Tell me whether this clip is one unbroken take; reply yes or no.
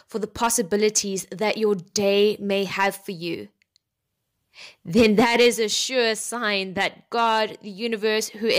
yes